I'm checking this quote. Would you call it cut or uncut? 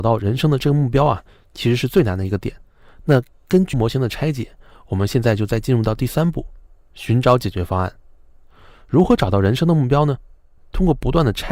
cut